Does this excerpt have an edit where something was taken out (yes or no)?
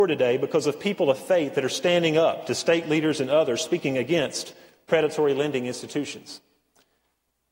no